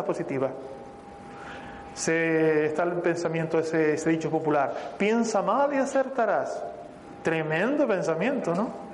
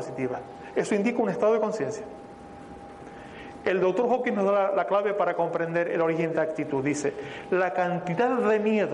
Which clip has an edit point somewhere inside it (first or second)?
second